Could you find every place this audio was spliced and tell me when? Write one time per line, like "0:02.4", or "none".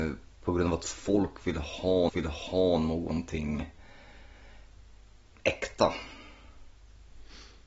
0:02.1